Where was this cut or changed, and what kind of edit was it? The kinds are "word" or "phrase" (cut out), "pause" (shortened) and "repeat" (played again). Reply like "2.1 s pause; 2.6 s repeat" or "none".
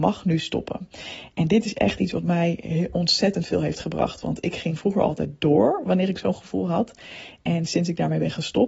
none